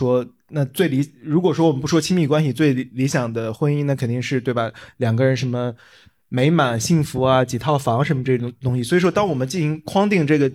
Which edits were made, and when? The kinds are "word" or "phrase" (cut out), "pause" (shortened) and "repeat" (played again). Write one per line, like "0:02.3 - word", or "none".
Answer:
none